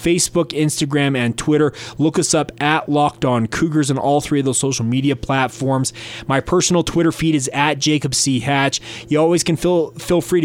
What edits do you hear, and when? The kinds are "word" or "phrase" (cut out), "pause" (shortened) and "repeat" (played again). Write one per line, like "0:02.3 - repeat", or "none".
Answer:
none